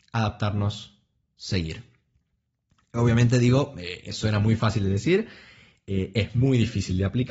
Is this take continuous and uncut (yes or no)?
yes